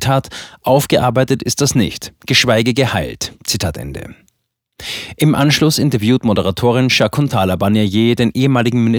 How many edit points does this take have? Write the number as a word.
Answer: one